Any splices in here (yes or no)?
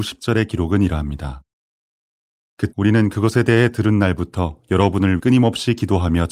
yes